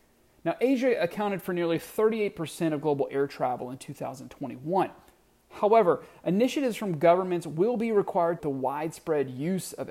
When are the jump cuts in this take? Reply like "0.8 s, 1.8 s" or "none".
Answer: 8.4 s